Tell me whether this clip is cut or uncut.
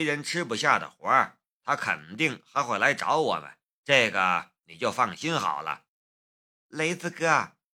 cut